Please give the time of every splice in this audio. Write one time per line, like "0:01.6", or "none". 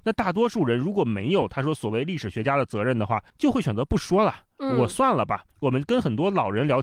0:03.3
0:05.5